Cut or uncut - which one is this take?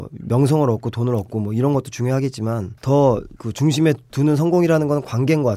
cut